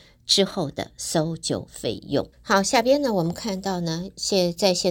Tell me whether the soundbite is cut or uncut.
cut